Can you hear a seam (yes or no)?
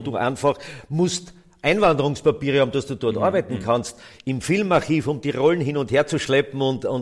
no